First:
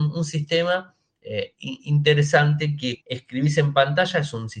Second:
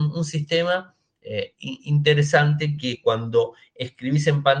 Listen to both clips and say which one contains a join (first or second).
first